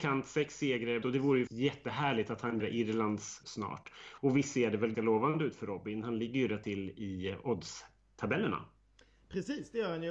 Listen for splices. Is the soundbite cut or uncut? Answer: cut